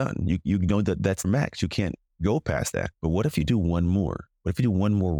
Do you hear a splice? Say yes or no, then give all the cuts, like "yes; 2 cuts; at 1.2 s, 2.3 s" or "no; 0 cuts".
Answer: yes; 2 cuts; at 1.2 s, 2.9 s